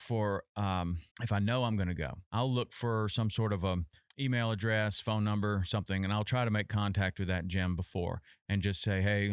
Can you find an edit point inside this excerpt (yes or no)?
yes